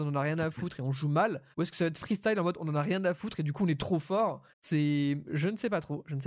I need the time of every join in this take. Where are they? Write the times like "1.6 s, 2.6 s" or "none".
1.5 s, 4.5 s